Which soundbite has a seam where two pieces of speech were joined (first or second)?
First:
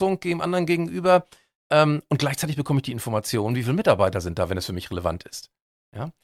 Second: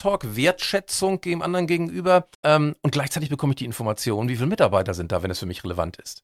second